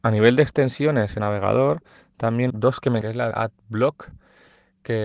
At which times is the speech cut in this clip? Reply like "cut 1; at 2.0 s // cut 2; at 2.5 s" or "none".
cut 1; at 1.2 s // cut 2; at 2.5 s // cut 3; at 3.0 s // cut 4; at 3.3 s

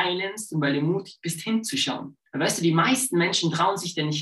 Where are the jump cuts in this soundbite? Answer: cut 1; at 2.3 s

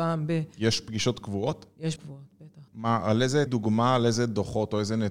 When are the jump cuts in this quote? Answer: cut 1; at 2.0 s // cut 2; at 2.7 s // cut 3; at 3.5 s

